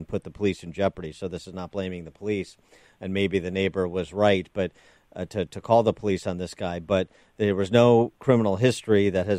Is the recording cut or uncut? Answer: uncut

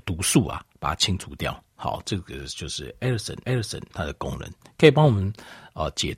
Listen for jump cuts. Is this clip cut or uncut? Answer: cut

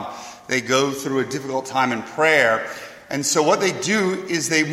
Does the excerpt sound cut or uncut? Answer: uncut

